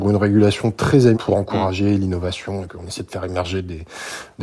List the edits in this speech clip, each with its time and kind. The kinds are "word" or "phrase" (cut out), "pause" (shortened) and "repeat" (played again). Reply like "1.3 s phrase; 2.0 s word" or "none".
1.1 s word; 2.7 s word